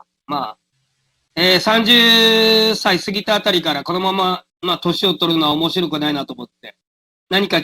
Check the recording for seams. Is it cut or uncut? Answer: cut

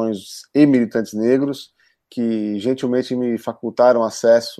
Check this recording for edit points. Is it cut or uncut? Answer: uncut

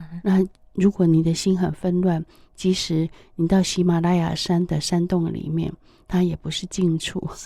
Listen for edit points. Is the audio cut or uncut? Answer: uncut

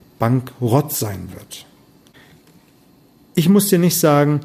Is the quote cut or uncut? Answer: uncut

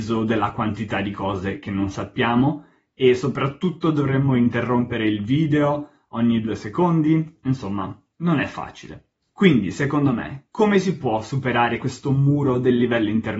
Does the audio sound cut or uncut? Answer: uncut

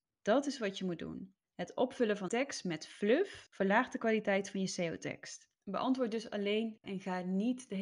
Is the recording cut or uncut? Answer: cut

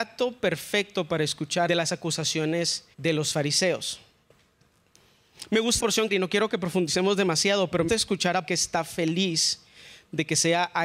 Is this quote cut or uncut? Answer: cut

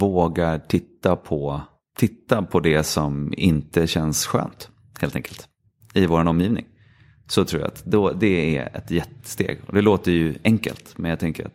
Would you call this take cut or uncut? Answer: cut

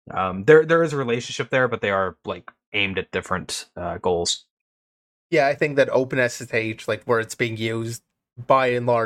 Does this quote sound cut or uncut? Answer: cut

